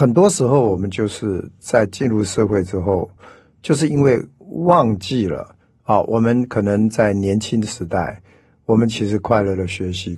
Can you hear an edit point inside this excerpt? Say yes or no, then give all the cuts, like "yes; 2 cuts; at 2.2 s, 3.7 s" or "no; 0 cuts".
no; 0 cuts